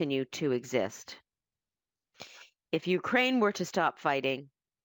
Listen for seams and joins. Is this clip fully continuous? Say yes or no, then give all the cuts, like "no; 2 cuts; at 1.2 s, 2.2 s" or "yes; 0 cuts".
yes; 0 cuts